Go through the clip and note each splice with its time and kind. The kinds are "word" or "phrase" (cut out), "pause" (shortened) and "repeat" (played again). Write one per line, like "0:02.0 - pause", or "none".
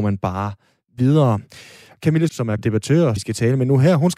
0:02.3 - word
0:02.6 - word
0:03.2 - word

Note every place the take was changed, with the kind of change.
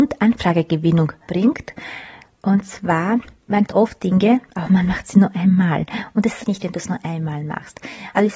0:03.7 - word
0:04.5 - pause
0:06.4 - word

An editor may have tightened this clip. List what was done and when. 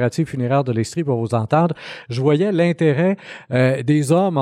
none

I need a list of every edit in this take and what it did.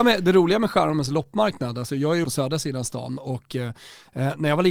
0:02.2 - word

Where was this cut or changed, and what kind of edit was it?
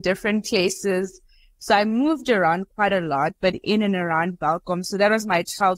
none

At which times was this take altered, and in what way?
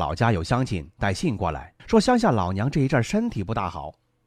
0:01.8 - pause

